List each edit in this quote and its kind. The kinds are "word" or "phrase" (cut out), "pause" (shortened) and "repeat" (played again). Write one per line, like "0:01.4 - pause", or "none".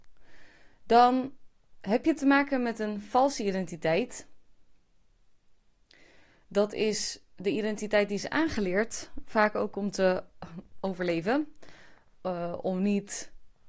none